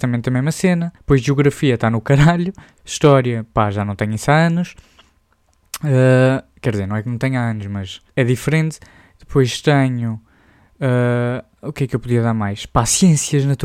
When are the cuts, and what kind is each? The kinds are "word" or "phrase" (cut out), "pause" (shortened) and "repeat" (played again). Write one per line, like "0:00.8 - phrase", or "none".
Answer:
0:01.0 - pause
0:08.1 - pause